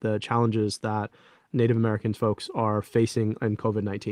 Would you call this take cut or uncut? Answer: uncut